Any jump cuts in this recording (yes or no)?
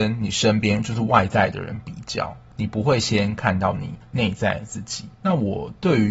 yes